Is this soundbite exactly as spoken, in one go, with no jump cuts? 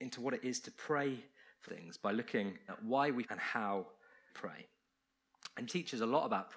no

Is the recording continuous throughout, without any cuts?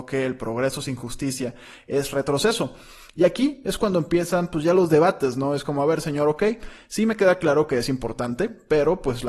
yes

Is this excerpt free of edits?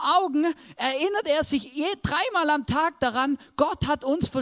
yes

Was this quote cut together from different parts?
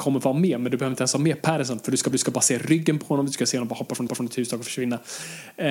yes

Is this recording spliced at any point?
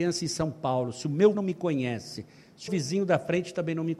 yes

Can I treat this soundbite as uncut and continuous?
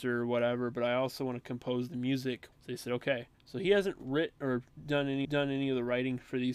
no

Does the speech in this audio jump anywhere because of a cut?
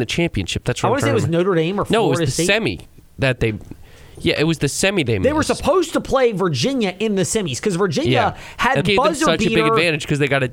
yes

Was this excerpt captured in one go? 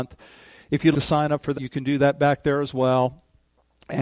no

